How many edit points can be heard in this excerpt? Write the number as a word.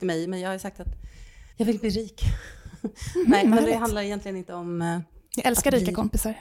two